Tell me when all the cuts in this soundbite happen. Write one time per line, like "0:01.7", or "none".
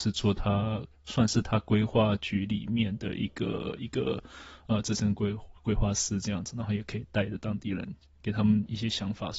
none